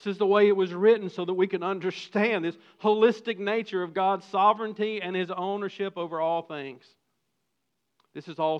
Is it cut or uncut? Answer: uncut